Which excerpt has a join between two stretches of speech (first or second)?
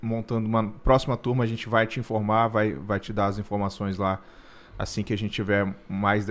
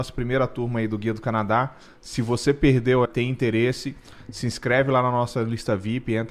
second